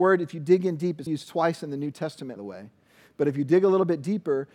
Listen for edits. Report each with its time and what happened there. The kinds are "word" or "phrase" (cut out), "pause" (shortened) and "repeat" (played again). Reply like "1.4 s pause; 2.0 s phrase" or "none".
1.1 s word; 2.4 s word